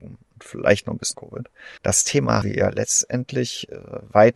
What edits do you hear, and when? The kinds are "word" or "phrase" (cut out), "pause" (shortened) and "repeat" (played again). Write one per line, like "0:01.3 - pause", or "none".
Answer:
0:01.1 - word
0:01.8 - pause
0:02.4 - word